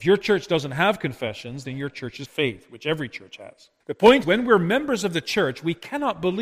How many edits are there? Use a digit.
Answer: 4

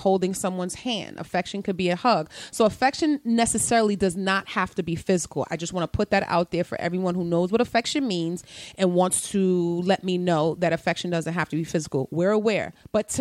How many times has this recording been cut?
0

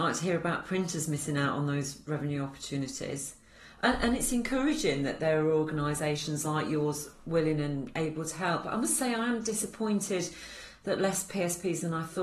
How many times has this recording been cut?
0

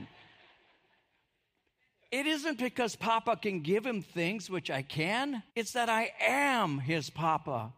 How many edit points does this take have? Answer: 1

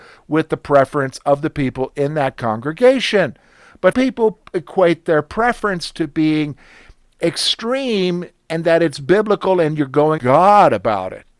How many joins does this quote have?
2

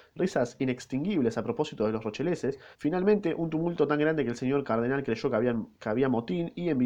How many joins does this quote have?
2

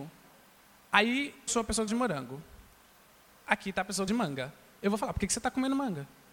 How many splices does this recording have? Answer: 3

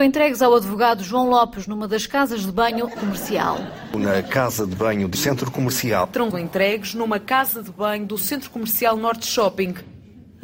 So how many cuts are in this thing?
3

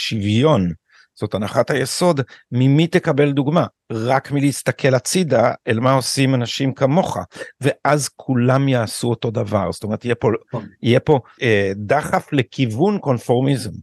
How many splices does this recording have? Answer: 1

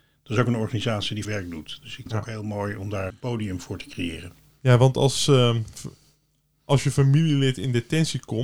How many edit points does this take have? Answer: 3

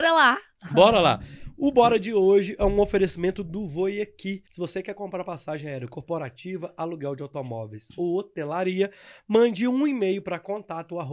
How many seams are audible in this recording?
1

